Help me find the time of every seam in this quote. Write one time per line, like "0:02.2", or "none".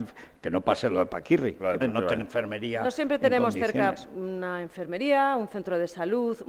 0:01.8
0:02.2